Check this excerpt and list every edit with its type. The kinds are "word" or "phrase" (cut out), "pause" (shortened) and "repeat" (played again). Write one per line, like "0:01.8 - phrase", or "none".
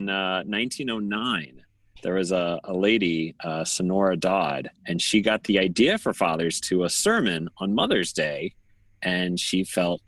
0:04.8 - pause
0:06.6 - phrase